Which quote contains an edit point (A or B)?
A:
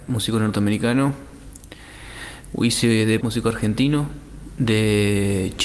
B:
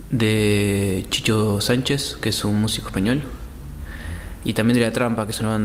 A